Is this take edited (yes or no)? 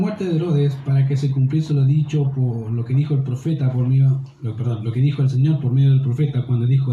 no